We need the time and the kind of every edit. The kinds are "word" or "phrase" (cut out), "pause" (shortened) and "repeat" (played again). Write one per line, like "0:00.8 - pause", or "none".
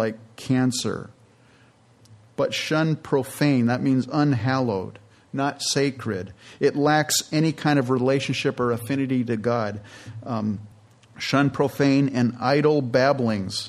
none